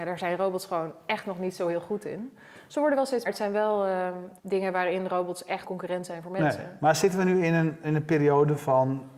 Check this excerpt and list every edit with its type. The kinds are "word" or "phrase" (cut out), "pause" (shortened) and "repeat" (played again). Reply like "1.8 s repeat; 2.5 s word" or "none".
3.3 s phrase; 4.4 s pause; 5.6 s phrase